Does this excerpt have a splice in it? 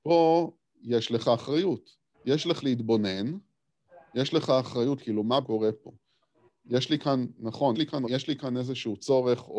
yes; 6 cuts; at 2.1 s, 2.6 s, 5.0 s, 5.4 s, 7.7 s, 8.1 s

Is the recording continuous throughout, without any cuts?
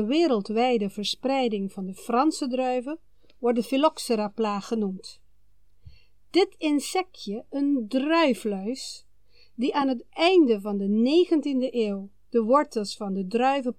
yes; 0 cuts

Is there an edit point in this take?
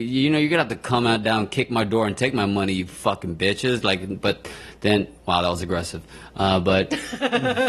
no; 0 cuts

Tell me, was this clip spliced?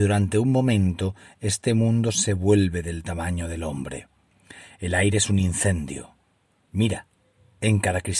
no; 0 cuts

